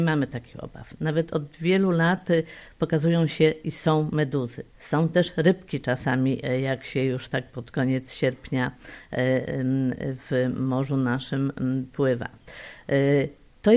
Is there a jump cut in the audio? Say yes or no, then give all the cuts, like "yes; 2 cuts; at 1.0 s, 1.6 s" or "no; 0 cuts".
yes; 1 cut; at 4.7 s